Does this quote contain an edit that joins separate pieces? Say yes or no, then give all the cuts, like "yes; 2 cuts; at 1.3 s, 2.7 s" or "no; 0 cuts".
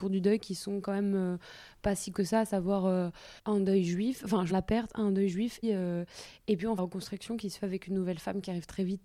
yes; 5 cuts; at 2.1 s, 3.4 s, 4.5 s, 5.6 s, 6.8 s